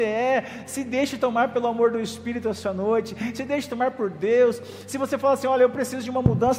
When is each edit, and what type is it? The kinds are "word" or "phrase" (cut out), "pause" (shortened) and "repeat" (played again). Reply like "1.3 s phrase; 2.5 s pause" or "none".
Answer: none

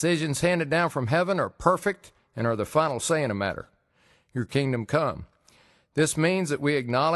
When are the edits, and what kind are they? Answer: none

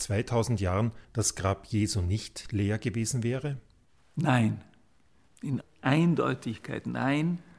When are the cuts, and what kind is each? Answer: 1.0 s pause; 5.6 s word

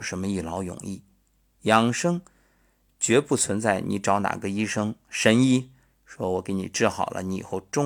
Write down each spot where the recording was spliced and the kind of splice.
none

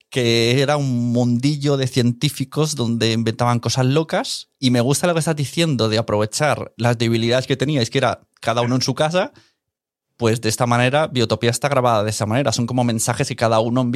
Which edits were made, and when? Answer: 4.5 s pause; 6.8 s word

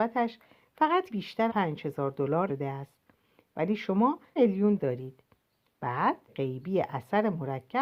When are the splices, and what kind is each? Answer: 1.1 s word; 1.5 s word; 2.5 s word; 4.4 s word; 4.8 s word; 6.3 s word

